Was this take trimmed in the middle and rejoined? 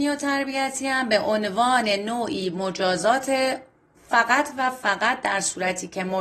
no; 0 cuts

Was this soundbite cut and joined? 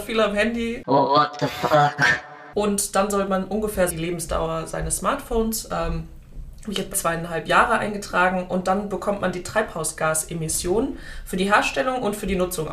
yes; 2 cuts; at 3.9 s, 6.9 s

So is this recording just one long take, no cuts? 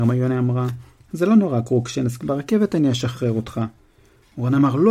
yes; 0 cuts

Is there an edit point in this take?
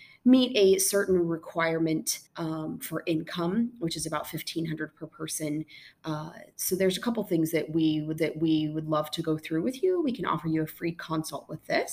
yes; 2 cuts; at 2.3 s, 8.2 s

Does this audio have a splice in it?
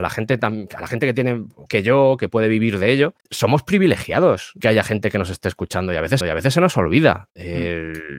yes; 4 cuts; at 1.7 s, 3.2 s, 4.6 s, 6.2 s

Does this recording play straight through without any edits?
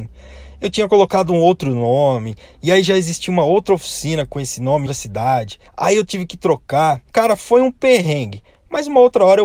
no; 3 cuts; at 4.9 s, 5.7 s, 7.1 s

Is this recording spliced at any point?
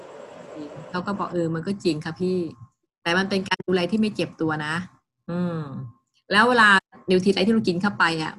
no; 0 cuts

